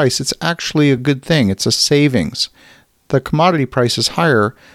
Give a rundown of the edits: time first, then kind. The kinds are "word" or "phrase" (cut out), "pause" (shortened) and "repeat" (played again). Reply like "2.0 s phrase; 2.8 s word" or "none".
none